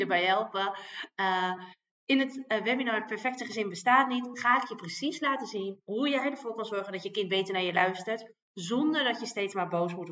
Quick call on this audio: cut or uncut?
uncut